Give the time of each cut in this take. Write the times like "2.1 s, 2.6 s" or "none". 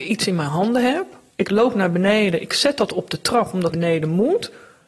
3.7 s